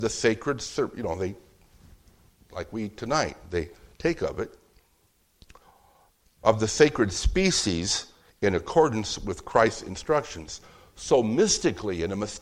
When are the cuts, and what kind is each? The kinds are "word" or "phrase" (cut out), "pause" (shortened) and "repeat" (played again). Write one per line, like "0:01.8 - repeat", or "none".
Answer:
none